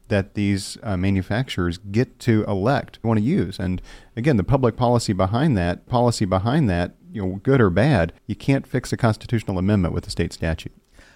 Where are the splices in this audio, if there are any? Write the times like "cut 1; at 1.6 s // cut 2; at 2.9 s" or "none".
cut 1; at 3.0 s // cut 2; at 5.9 s // cut 3; at 8.2 s